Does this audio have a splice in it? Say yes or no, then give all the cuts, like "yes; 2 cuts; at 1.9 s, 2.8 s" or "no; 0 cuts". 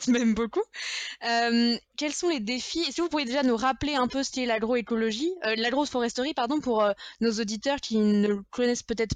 yes; 1 cut; at 1.9 s